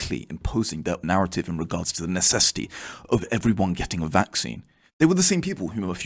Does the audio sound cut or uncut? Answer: cut